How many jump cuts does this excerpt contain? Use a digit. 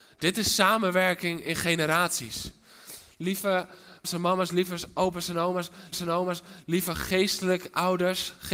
2